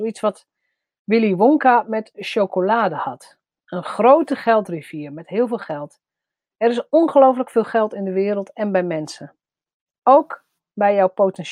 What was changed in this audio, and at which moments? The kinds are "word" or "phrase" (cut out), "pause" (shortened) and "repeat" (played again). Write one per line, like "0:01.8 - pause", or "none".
none